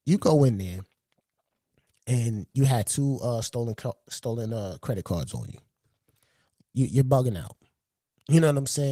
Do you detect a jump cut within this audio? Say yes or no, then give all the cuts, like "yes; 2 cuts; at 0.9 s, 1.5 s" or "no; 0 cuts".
no; 0 cuts